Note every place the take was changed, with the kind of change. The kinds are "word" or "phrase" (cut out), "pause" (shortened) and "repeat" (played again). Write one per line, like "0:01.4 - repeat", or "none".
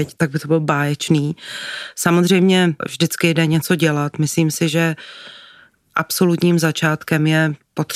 none